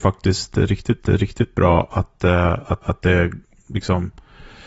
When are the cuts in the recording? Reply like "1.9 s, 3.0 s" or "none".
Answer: 1.0 s, 2.8 s